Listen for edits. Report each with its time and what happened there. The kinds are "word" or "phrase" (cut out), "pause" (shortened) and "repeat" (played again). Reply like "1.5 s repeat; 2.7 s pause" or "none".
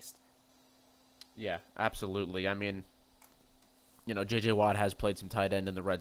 none